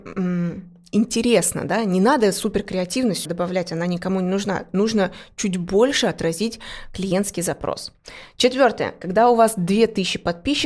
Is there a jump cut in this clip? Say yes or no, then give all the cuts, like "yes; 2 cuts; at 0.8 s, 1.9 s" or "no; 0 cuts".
yes; 1 cut; at 3.3 s